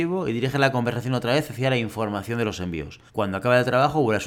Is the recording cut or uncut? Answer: cut